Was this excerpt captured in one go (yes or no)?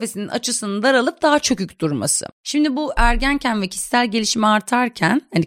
yes